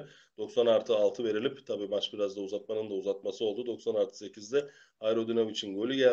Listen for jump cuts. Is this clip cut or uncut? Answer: uncut